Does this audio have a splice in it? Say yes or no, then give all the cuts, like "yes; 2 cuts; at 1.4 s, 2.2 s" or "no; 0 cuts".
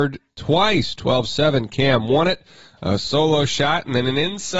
no; 0 cuts